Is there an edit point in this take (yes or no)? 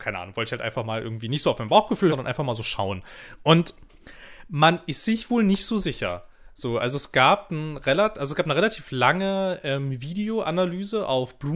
yes